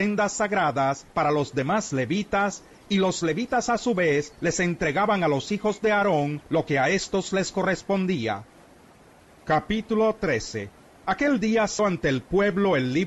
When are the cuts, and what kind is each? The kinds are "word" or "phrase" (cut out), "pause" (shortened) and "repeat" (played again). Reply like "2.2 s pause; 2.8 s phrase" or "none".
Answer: 11.8 s word